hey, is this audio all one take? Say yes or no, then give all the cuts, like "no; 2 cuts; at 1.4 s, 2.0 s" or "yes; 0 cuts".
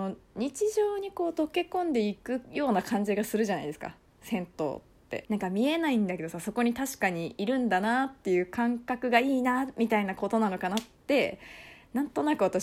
no; 1 cut; at 5.2 s